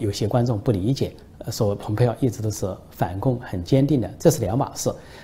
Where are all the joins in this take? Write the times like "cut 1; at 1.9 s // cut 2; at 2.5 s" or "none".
none